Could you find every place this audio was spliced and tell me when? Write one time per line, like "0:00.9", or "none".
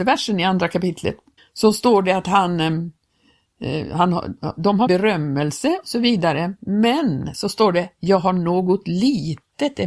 0:01.4
0:04.9